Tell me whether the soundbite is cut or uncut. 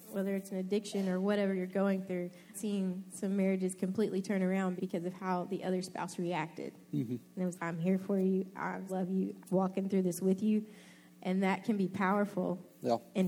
cut